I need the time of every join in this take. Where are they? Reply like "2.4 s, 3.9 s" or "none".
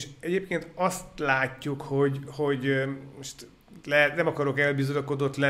none